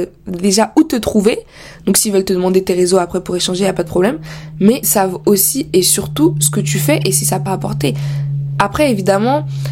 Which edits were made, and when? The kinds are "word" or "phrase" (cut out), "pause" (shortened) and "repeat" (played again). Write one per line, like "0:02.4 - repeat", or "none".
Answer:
0:04.8 - word
0:07.5 - word